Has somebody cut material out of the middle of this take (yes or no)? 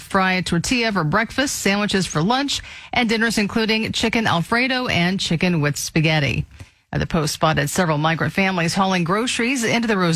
no